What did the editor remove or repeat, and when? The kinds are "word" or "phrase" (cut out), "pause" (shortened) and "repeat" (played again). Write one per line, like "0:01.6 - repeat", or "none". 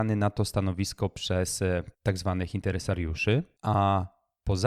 0:01.9 - pause